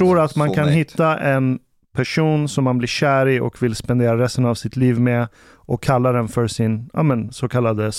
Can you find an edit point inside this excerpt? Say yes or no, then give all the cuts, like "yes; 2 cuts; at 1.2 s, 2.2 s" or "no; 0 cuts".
no; 0 cuts